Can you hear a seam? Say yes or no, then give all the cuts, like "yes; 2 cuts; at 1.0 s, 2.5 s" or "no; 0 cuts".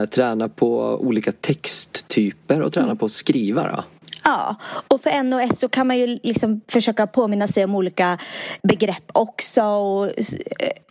yes; 1 cut; at 8.6 s